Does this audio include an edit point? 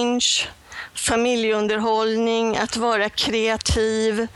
no; 0 cuts

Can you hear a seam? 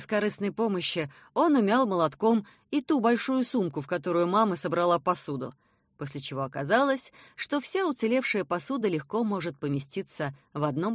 no; 0 cuts

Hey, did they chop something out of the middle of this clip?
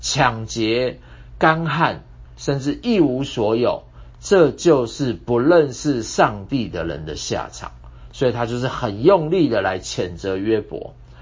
yes; 1 cut; at 2.2 s

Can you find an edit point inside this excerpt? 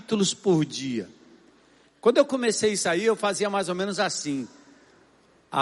no; 0 cuts

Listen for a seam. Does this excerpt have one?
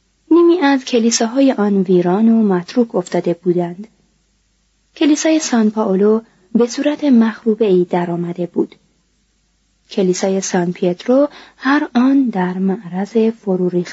no; 0 cuts

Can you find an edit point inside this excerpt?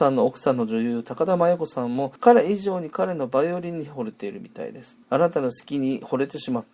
yes; 2 cuts; at 2.2 s, 5.0 s

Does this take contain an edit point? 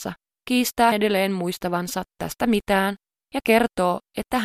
yes; 1 cut; at 0.9 s

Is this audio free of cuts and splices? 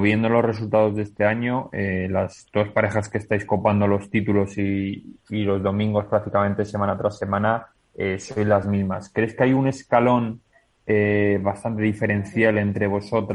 yes; 0 cuts

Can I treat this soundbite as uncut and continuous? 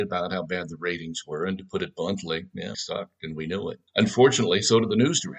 no; 2 cuts; at 2.7 s, 3.9 s

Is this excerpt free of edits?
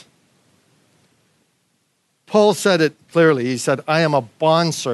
no; 1 cut; at 3.0 s

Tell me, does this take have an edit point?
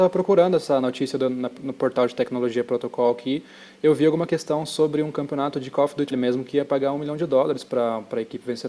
yes; 2 cuts; at 1.6 s, 6.1 s

